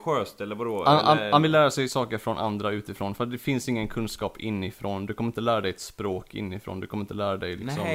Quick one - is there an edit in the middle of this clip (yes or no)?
no